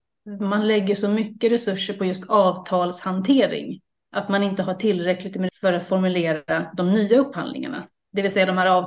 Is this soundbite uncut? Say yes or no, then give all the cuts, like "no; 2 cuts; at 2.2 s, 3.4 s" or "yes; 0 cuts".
no; 2 cuts; at 4.0 s, 5.5 s